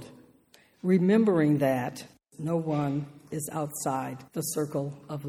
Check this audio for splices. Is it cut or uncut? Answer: cut